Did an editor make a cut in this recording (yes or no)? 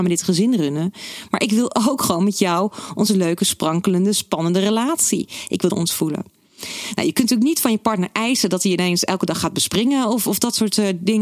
yes